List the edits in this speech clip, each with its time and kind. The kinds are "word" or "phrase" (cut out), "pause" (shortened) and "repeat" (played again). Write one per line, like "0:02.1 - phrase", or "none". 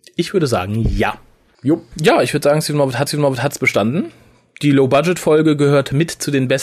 0:03.1 - repeat